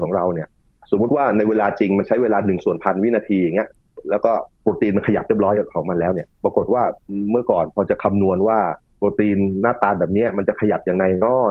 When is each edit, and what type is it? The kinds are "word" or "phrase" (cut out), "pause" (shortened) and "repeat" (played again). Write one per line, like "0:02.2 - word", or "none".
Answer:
0:04.5 - pause
0:06.3 - pause